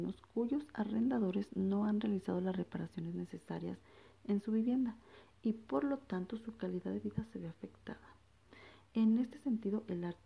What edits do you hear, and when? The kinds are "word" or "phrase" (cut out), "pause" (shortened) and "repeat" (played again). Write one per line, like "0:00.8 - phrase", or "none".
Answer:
none